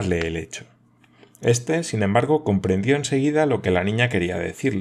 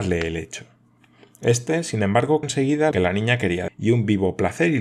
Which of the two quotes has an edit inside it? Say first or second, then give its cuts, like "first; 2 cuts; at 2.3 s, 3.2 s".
second; 3 cuts; at 2.4 s, 2.9 s, 3.7 s